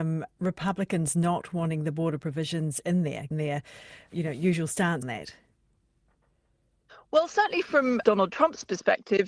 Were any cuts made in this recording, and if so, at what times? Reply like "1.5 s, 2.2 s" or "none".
3.3 s, 4.1 s, 5.0 s, 8.0 s